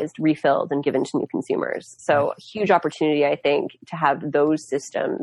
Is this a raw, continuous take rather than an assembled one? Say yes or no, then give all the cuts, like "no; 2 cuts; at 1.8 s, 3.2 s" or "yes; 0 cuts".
yes; 0 cuts